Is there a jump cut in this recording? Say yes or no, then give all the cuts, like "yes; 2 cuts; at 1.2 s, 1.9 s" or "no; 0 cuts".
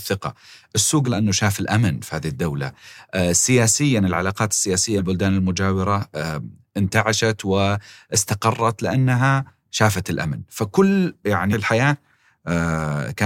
yes; 3 cuts; at 1.0 s, 5.0 s, 11.5 s